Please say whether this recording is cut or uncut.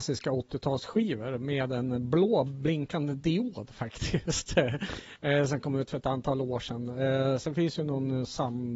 uncut